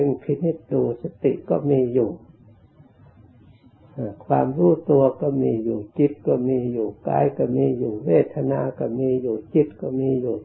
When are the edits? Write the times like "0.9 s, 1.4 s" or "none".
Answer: none